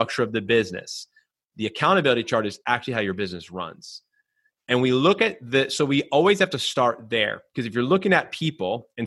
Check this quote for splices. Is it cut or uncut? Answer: uncut